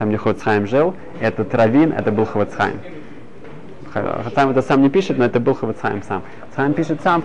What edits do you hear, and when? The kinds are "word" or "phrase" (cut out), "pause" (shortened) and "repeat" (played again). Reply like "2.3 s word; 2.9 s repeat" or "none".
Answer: none

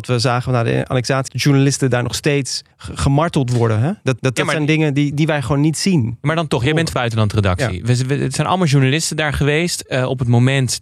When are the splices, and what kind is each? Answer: 1.3 s word; 2.7 s pause; 4.2 s repeat; 5.1 s word; 6.9 s word

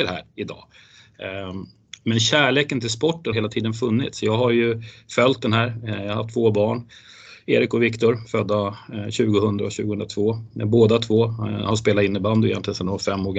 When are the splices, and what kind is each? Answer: 2.0 s word; 3.3 s word

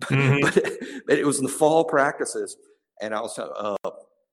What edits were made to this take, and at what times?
none

